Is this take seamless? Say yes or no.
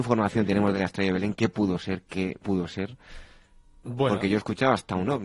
no